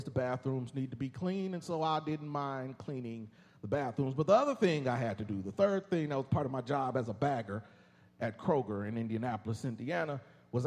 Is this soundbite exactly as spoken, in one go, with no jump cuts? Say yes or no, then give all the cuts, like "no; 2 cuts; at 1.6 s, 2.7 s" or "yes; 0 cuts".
yes; 0 cuts